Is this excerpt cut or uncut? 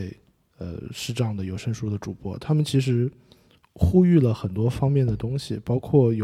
uncut